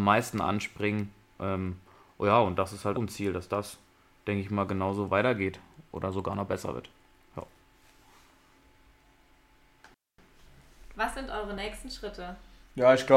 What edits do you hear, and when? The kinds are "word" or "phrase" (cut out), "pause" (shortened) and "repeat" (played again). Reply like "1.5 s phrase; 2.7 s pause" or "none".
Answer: 2.9 s word